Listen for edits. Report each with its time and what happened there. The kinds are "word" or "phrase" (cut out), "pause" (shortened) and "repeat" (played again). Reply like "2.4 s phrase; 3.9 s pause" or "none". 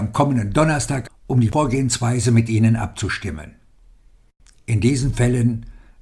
1.1 s word